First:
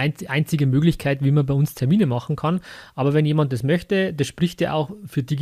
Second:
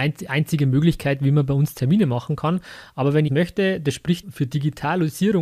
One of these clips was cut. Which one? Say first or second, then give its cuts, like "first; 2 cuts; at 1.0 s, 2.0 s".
second; 2 cuts; at 3.3 s, 4.2 s